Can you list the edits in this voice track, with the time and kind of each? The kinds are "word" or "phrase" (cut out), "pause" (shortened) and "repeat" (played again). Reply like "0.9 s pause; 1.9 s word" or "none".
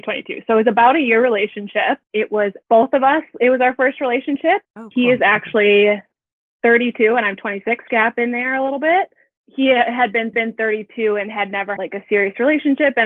2.0 s pause; 2.6 s word; 4.6 s pause; 7.9 s phrase; 10.3 s repeat; 11.8 s word